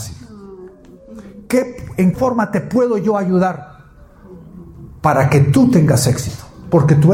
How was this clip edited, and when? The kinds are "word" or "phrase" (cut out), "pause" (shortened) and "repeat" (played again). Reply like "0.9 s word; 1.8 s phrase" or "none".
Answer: 2.1 s word